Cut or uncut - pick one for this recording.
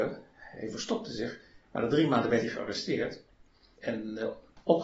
uncut